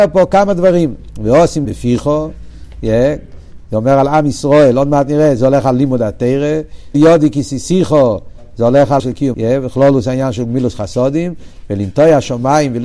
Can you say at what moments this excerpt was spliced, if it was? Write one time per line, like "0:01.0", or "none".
0:01.6
0:06.9
0:09.0
0:09.3